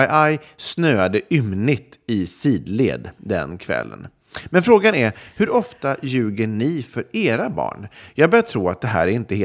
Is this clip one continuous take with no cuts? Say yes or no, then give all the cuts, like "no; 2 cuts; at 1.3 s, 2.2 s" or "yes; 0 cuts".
yes; 0 cuts